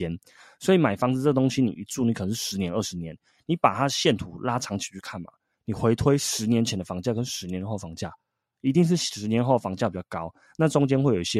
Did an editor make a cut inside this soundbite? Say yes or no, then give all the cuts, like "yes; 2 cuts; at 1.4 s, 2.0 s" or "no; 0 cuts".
no; 0 cuts